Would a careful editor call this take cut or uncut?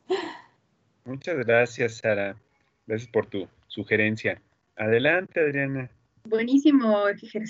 uncut